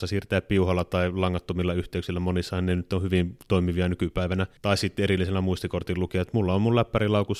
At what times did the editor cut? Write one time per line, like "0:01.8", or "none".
0:04.6